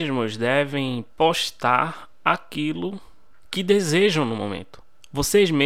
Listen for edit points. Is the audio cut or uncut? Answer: uncut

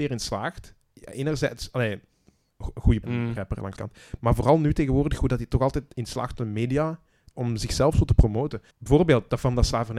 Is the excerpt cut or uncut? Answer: cut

